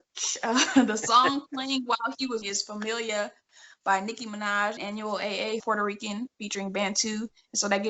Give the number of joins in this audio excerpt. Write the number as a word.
three